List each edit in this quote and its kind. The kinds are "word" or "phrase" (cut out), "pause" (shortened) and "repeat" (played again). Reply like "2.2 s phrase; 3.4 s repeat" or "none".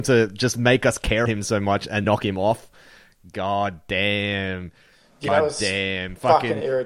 1.3 s word; 2.0 s word; 5.3 s word